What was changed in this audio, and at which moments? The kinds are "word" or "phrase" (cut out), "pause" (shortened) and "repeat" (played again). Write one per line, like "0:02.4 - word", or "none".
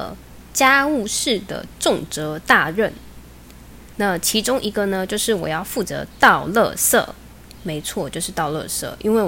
none